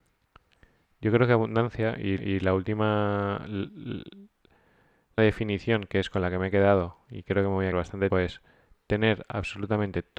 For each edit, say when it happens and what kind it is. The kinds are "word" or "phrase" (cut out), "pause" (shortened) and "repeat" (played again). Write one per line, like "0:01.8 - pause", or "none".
0:02.2 - repeat
0:05.2 - word
0:07.7 - word
0:08.1 - word